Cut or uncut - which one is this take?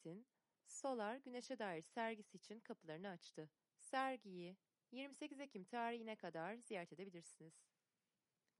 cut